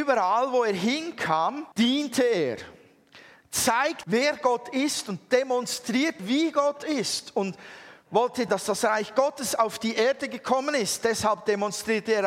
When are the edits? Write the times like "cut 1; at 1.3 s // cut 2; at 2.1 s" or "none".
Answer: cut 1; at 1.7 s // cut 2; at 4.0 s // cut 3; at 6.2 s // cut 4; at 8.5 s